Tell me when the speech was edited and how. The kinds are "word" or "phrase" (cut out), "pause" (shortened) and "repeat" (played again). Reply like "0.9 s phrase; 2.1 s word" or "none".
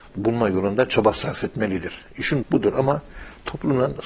2.4 s word